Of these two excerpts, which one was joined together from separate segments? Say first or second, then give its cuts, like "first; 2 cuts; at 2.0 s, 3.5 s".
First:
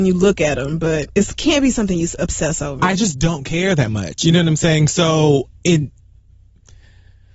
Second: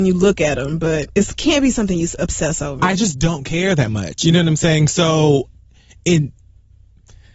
first; 1 cut; at 5.5 s